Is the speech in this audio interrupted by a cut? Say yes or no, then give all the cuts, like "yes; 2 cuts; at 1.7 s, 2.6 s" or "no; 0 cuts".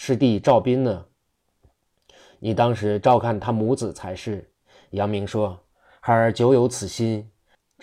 no; 0 cuts